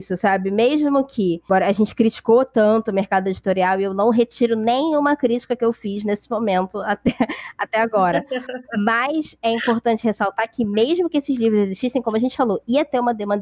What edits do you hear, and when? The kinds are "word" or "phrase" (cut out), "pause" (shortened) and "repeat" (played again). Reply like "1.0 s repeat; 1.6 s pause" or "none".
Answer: none